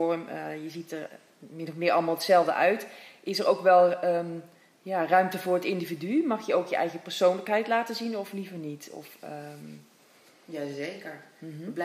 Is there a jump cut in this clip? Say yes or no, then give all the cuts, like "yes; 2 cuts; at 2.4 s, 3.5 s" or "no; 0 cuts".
no; 0 cuts